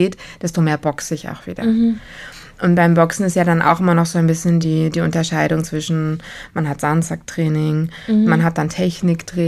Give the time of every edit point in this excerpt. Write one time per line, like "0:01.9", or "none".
none